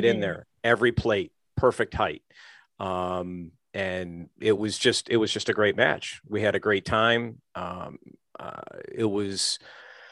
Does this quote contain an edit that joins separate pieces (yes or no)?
no